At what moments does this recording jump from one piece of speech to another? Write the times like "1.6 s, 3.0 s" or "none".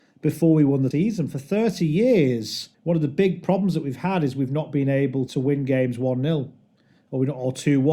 0.9 s, 2.7 s, 5.3 s